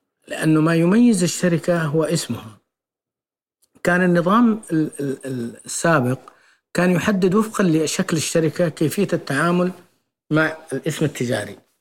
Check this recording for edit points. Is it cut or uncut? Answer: uncut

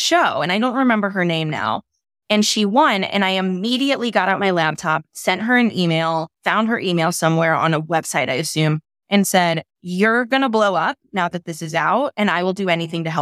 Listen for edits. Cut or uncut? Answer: uncut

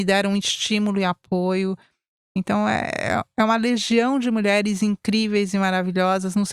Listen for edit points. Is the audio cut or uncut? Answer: uncut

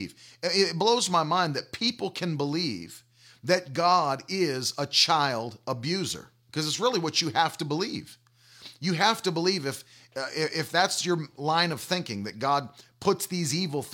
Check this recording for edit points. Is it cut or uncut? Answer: uncut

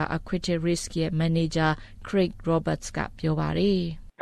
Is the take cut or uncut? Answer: uncut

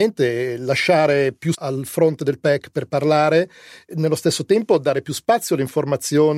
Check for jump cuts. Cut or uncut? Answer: cut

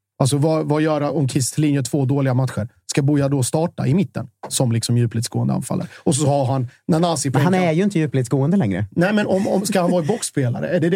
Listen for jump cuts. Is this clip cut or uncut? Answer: uncut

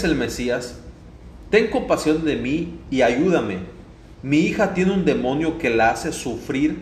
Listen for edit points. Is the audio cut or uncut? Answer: uncut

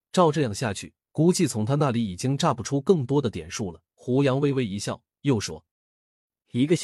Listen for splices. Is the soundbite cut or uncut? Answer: cut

